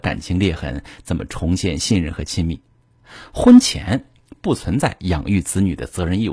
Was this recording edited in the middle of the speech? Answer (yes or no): no